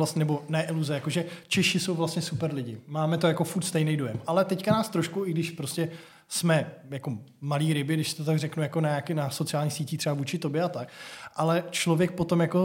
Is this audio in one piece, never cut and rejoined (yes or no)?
yes